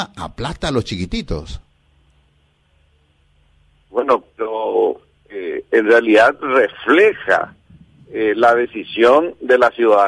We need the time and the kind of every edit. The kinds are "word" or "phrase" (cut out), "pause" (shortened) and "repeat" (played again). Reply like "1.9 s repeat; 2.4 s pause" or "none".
none

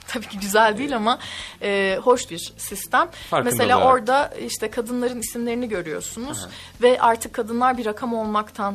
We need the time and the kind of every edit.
2.3 s word

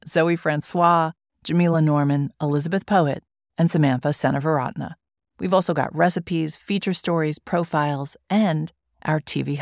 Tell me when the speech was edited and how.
none

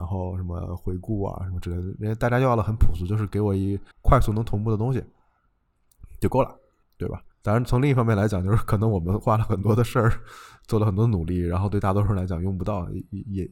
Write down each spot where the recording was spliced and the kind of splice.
3.9 s pause; 6.8 s pause; 7.3 s pause

